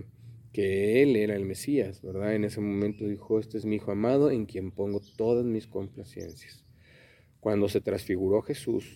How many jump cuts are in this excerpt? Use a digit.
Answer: 0